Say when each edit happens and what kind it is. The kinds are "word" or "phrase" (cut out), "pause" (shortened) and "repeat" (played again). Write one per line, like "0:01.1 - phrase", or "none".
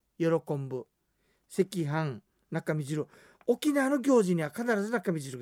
none